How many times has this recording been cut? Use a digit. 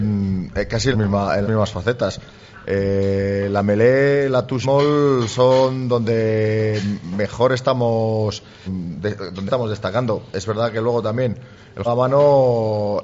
6